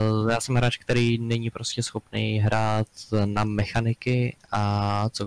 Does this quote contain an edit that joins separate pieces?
no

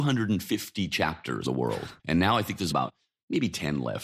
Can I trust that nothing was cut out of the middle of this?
no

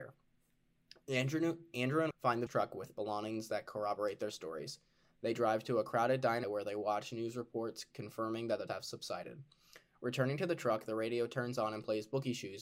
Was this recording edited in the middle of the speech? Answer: yes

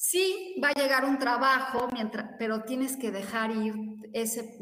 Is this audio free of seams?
yes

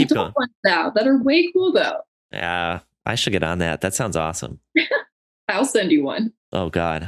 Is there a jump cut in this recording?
no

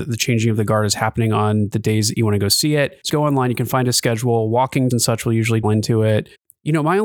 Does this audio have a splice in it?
yes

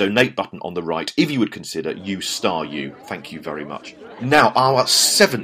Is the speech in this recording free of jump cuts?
yes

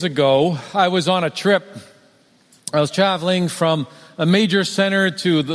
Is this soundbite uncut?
yes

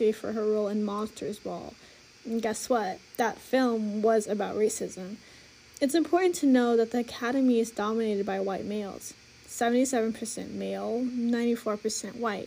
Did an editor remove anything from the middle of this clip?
yes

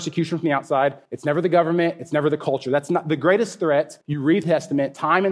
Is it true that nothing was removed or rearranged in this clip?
no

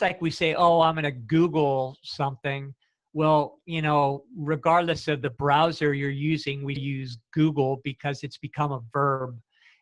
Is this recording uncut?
no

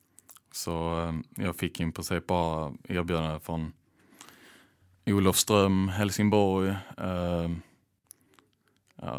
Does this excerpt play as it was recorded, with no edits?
yes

